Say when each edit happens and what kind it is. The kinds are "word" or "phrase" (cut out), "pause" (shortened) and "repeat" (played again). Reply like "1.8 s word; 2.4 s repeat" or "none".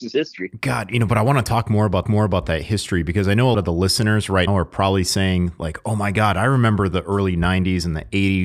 2.0 s repeat; 3.5 s word; 4.5 s word